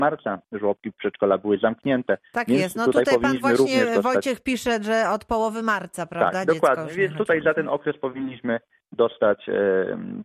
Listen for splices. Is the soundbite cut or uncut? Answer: uncut